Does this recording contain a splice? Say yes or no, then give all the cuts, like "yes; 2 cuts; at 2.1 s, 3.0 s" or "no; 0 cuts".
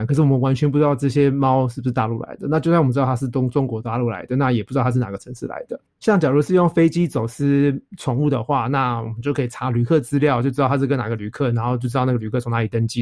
yes; 1 cut; at 5.9 s